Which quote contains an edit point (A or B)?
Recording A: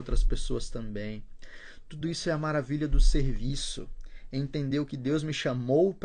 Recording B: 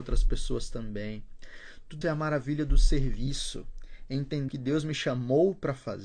B